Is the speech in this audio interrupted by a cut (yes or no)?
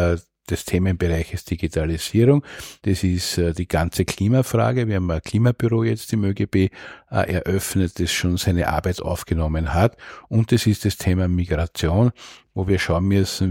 no